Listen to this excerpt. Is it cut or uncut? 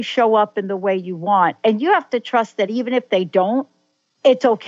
uncut